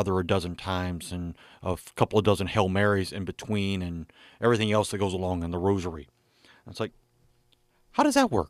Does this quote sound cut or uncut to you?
uncut